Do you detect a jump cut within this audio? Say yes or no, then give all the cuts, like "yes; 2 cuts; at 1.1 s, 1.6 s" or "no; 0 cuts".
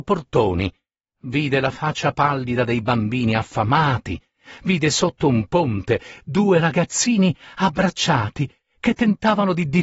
no; 0 cuts